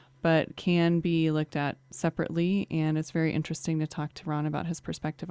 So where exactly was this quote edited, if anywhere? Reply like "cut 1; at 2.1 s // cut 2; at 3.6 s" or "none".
none